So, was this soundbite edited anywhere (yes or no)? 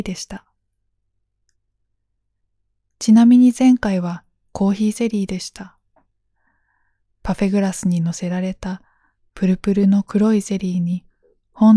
no